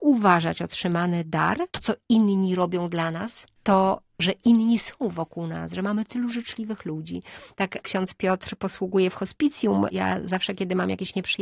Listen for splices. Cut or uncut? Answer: cut